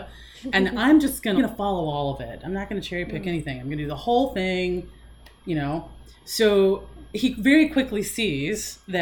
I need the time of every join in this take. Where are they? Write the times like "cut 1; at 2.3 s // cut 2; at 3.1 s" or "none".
cut 1; at 1.4 s